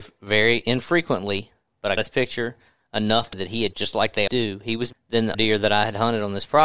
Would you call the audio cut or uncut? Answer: cut